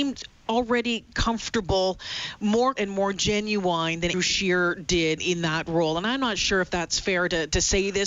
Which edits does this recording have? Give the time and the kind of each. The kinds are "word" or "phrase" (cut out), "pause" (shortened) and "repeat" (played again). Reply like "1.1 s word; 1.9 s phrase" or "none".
2.8 s word; 4.1 s word; 5.2 s word